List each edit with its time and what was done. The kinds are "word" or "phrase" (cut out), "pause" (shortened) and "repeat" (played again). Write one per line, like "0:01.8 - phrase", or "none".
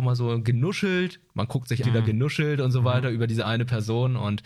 0:01.8 - phrase